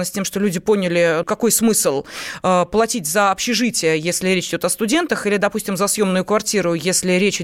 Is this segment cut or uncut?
cut